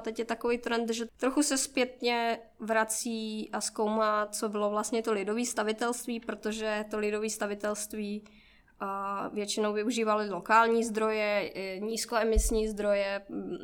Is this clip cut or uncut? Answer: uncut